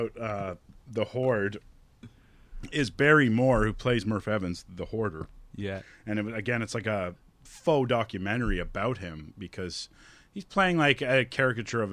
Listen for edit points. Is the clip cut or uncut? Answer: uncut